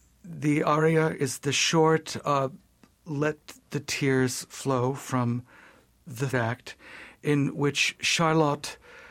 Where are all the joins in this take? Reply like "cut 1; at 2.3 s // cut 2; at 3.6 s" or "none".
cut 1; at 6.3 s